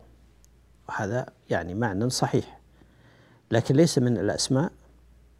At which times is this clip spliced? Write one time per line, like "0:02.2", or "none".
none